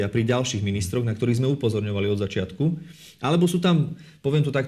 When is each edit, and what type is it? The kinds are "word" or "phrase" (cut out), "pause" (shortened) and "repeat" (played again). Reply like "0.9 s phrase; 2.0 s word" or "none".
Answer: none